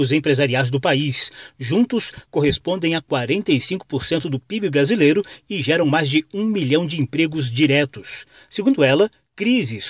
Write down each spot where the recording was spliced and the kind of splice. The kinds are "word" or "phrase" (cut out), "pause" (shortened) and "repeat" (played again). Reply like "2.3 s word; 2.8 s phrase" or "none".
none

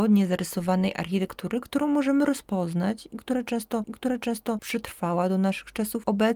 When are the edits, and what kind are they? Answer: 3.8 s repeat

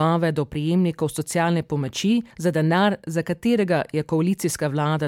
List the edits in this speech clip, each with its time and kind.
2.3 s pause

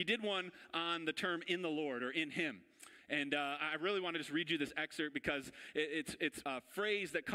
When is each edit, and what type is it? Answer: 6.4 s word

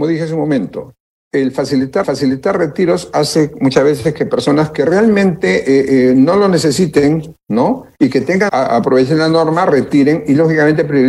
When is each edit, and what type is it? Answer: 2.0 s repeat; 8.5 s phrase

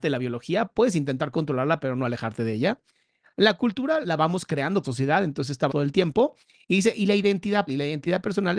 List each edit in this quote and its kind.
4.0 s word; 4.8 s word; 5.7 s word; 7.7 s word

